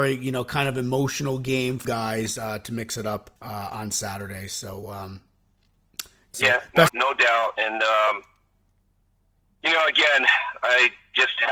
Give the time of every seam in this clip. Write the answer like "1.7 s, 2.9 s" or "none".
1.8 s, 3.4 s, 6.3 s, 6.9 s